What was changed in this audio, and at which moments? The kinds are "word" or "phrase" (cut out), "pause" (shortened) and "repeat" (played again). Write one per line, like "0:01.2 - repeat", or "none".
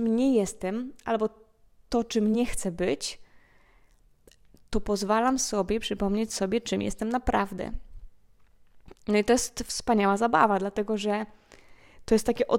none